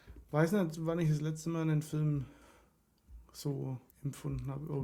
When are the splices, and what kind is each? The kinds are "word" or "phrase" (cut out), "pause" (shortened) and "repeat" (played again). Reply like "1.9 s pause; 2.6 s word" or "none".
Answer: 3.9 s pause